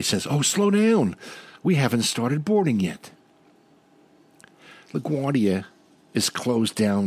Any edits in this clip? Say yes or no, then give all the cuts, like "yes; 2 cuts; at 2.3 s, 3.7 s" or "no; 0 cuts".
no; 0 cuts